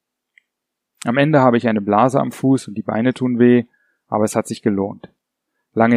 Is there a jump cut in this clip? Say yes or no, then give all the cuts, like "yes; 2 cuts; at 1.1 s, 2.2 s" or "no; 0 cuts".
no; 0 cuts